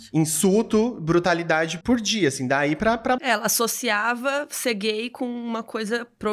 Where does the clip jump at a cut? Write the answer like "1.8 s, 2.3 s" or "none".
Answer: 1.8 s, 3.2 s